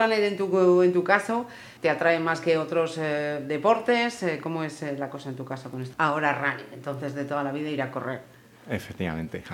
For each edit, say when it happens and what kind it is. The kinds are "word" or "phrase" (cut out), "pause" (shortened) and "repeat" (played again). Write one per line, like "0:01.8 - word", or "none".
0:01.8 - pause
0:05.9 - word

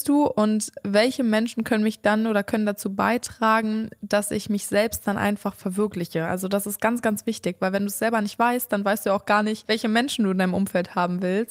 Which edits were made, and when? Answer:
none

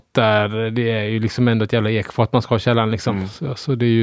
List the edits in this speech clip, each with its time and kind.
none

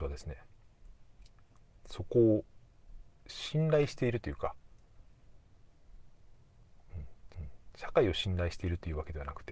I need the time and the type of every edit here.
0:07.3 - repeat

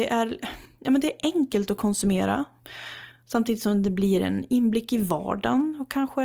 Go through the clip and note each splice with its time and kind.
none

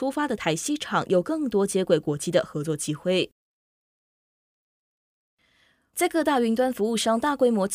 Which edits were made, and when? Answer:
none

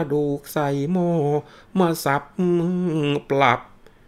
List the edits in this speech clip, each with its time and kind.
none

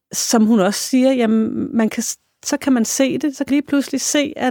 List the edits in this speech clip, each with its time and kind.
0:03.5 - word

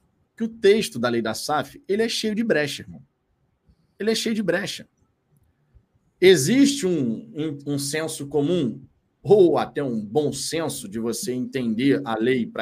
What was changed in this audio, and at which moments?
none

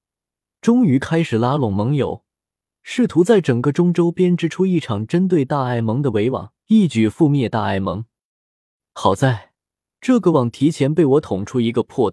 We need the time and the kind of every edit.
0:06.6 - pause

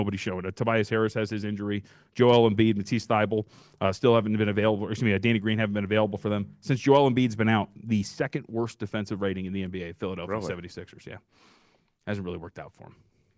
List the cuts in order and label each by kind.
none

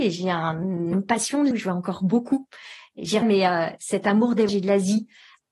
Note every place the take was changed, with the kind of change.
0:00.9 - word
0:01.5 - word
0:03.2 - word
0:04.5 - word

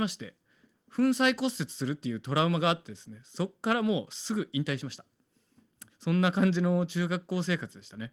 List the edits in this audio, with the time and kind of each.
0:05.9 - pause

